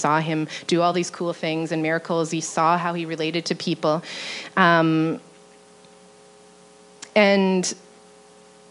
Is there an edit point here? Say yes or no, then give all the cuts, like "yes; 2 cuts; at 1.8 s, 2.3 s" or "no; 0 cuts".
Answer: no; 0 cuts